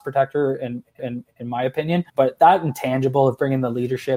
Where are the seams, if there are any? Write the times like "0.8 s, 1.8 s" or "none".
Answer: 1.0 s, 2.1 s